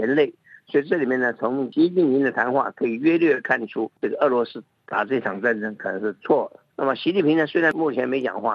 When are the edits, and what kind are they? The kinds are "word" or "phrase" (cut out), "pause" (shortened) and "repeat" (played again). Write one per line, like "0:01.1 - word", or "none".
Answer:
0:04.0 - pause